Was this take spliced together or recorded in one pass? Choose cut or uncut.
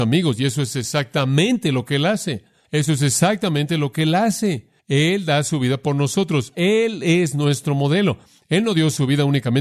uncut